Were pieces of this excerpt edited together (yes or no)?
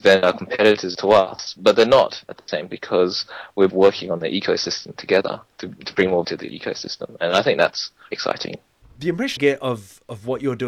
yes